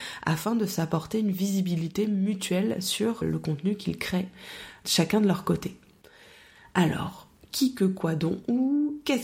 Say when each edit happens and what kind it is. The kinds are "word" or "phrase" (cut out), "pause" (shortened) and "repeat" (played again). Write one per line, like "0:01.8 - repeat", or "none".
0:03.2 - word
0:04.8 - word
0:06.0 - pause